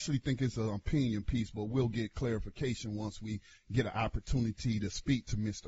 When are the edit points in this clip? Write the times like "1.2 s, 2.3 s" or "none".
none